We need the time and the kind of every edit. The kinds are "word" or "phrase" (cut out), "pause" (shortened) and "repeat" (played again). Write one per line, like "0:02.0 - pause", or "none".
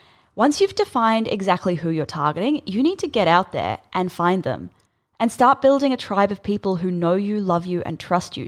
none